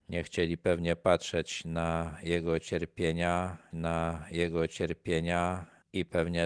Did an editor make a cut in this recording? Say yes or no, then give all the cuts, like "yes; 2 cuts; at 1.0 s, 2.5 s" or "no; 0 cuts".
yes; 1 cut; at 3.7 s